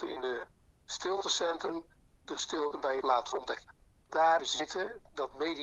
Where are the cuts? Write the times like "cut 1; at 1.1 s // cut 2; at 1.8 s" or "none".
cut 1; at 2.3 s // cut 2; at 3.0 s // cut 3; at 4.1 s // cut 4; at 4.4 s